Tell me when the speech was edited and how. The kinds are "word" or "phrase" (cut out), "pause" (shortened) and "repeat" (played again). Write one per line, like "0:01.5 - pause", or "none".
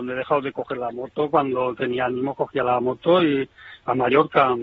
none